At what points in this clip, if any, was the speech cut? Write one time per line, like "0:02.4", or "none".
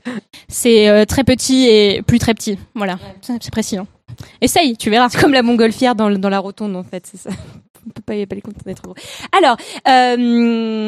none

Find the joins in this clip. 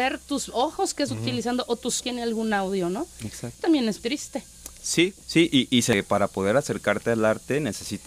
0:01.1
0:02.0
0:03.6
0:04.0
0:05.2

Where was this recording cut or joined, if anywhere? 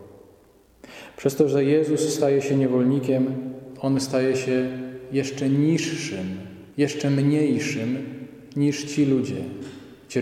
0:06.7

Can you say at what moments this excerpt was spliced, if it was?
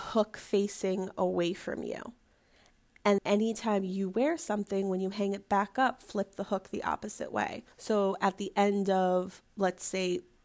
0:03.2
0:07.7

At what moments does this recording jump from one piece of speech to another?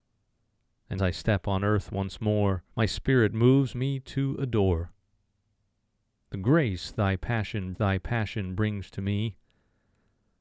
0:01.0
0:02.7
0:07.7

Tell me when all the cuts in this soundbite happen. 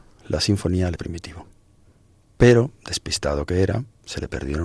0:01.0

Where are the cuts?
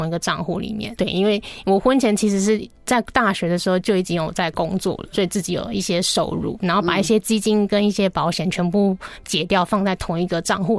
0:01.0
0:05.1

